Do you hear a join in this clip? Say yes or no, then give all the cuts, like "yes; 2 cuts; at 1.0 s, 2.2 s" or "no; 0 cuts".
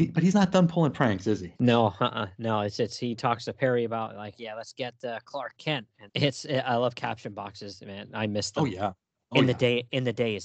yes; 2 cuts; at 1.6 s, 6.1 s